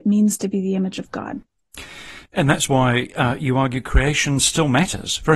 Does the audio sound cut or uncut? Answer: uncut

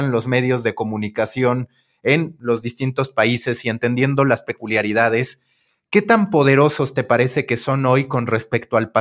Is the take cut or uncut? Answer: uncut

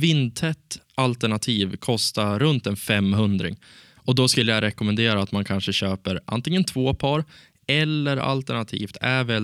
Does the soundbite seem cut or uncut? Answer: uncut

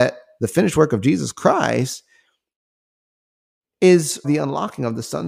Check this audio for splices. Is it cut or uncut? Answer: cut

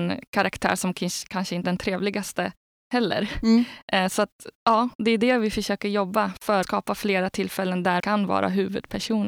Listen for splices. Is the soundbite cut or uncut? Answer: cut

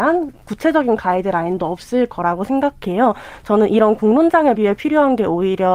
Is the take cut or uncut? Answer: cut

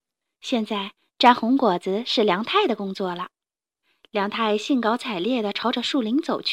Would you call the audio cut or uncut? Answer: cut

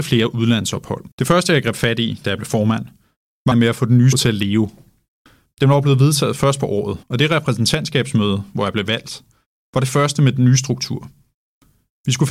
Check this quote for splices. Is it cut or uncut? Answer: cut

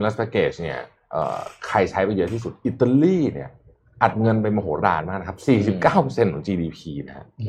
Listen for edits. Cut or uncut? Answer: uncut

